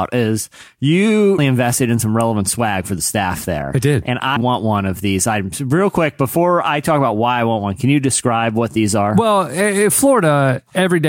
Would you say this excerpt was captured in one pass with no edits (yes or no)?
no